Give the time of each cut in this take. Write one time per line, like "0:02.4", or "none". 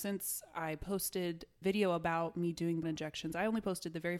0:01.6
0:02.8